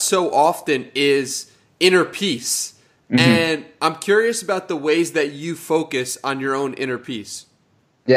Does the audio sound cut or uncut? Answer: uncut